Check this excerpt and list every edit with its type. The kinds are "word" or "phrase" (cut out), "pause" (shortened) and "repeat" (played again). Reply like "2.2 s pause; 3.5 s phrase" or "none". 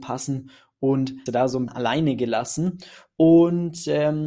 1.3 s phrase; 1.7 s word